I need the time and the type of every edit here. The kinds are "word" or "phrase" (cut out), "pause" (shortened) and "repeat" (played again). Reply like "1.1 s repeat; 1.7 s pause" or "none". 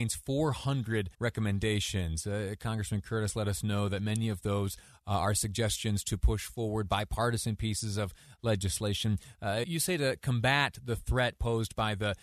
1.1 s pause; 9.6 s word